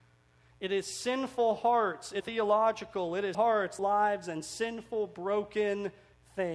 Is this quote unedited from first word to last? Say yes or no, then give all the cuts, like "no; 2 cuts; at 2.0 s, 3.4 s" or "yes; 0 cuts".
no; 3 cuts; at 2.2 s, 3.3 s, 3.8 s